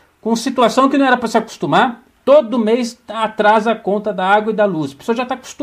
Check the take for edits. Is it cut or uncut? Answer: uncut